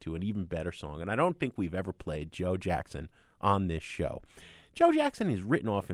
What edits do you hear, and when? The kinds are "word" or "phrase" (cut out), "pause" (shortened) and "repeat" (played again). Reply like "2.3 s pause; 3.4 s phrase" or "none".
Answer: none